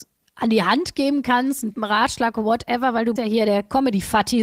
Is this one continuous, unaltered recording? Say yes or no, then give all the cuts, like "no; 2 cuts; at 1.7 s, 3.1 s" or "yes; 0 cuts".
no; 2 cuts; at 1.7 s, 3.2 s